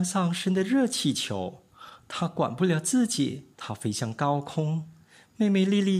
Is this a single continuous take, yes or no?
no